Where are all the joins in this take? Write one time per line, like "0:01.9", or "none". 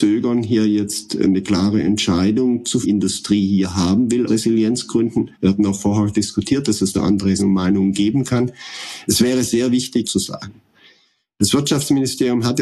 0:02.8
0:04.3
0:05.3
0:06.9
0:07.4
0:10.0